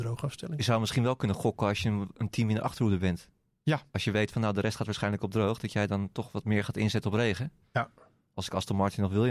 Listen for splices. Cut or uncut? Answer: uncut